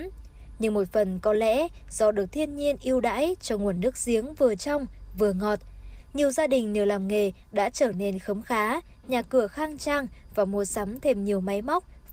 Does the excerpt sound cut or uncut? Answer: uncut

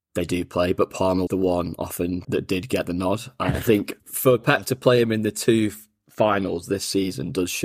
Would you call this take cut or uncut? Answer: cut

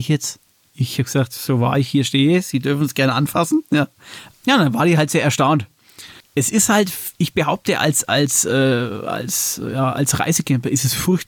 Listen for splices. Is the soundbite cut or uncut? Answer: uncut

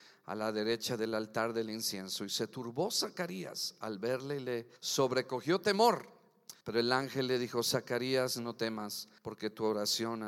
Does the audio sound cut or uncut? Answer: cut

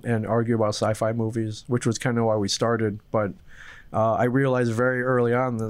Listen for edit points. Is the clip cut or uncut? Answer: uncut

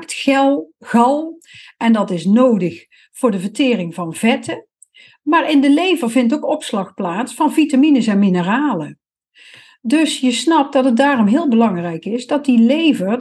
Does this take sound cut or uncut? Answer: uncut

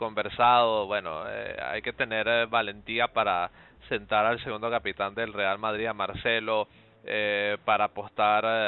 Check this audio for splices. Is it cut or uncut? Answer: uncut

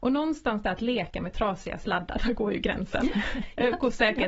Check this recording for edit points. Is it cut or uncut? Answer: uncut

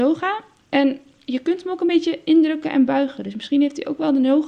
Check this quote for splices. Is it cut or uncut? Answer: uncut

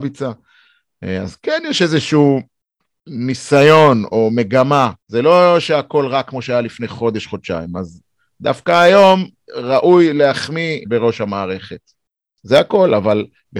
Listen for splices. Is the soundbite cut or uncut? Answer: cut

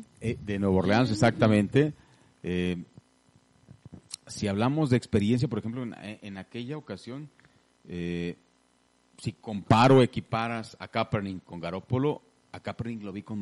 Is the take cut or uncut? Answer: uncut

